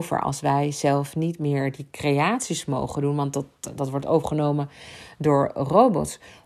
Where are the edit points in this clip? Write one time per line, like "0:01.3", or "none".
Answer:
none